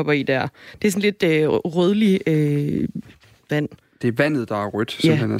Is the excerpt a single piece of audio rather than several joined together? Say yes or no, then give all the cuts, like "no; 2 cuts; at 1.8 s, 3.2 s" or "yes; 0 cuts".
no; 1 cut; at 3.5 s